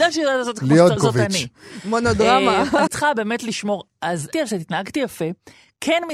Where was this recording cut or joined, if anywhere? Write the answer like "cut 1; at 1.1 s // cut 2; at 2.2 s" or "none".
cut 1; at 1.0 s // cut 2; at 2.9 s // cut 3; at 4.3 s